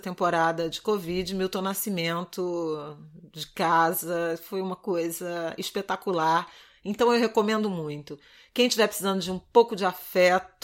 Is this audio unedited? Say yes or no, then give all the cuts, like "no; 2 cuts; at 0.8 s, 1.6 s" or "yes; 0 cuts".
yes; 0 cuts